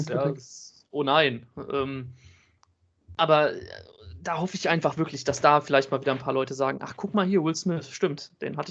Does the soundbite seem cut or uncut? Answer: uncut